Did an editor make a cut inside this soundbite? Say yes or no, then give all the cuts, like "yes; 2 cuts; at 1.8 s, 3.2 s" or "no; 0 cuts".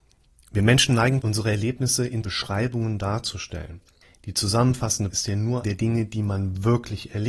yes; 5 cuts; at 1.2 s, 2.2 s, 4.0 s, 5.1 s, 5.6 s